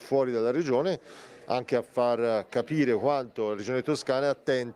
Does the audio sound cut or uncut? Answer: uncut